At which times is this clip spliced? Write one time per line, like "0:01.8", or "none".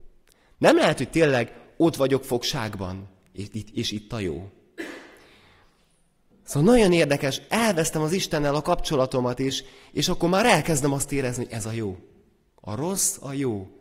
none